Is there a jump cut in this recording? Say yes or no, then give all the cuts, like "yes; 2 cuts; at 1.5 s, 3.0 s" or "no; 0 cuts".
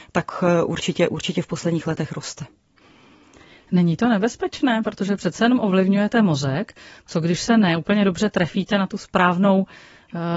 no; 0 cuts